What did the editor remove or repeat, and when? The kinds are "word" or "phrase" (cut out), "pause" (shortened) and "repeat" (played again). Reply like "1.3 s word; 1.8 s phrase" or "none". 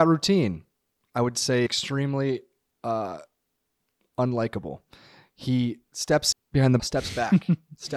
1.7 s word; 6.3 s word; 6.8 s word